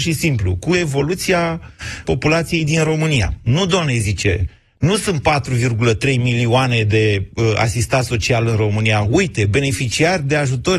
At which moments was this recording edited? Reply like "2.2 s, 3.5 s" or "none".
2.0 s